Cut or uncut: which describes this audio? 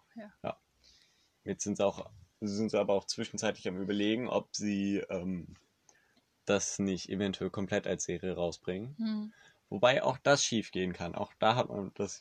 uncut